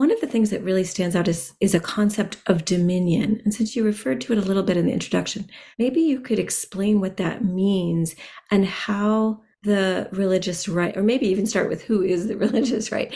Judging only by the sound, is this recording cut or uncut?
cut